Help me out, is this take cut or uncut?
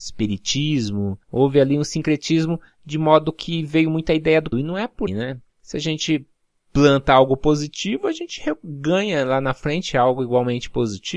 cut